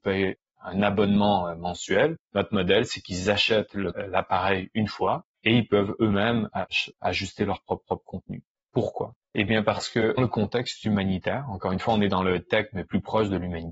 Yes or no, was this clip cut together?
yes